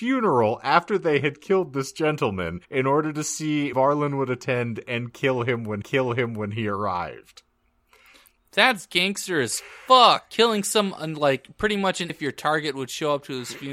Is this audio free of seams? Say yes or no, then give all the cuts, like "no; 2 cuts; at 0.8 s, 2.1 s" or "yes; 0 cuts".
no; 4 cuts; at 2.6 s, 3.7 s, 5.8 s, 12.1 s